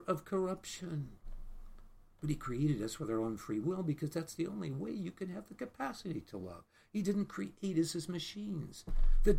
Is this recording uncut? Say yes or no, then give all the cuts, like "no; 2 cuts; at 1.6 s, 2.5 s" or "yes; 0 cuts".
yes; 0 cuts